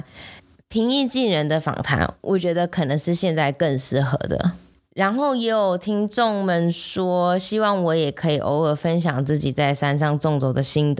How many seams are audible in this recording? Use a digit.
1